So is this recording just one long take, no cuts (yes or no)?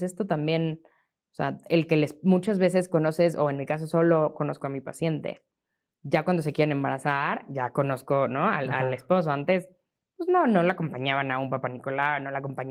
yes